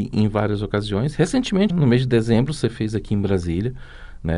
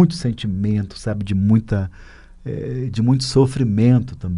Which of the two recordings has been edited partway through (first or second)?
first